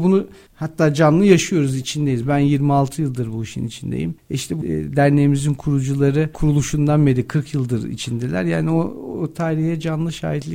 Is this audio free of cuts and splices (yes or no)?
yes